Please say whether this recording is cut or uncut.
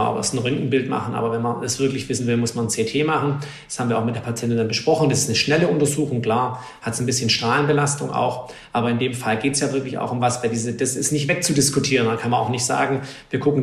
uncut